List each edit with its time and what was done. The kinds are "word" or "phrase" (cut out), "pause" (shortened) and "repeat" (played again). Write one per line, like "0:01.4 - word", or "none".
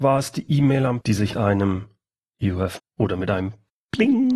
0:01.0 - word
0:01.3 - word
0:02.8 - word